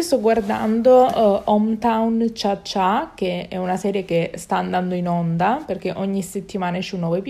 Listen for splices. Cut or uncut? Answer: uncut